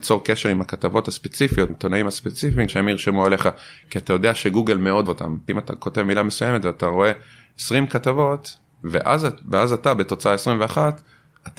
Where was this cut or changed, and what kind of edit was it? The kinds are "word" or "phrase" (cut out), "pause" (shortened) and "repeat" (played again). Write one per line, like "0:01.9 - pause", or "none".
0:01.7 - phrase
0:02.7 - word
0:05.1 - word